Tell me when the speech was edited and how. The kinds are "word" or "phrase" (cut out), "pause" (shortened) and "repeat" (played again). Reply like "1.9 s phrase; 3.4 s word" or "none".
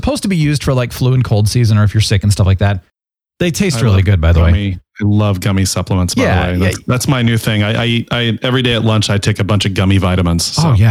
none